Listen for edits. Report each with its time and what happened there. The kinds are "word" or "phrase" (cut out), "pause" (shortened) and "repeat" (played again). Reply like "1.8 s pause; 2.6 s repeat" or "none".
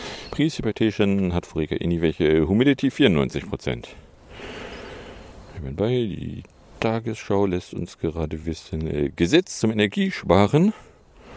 none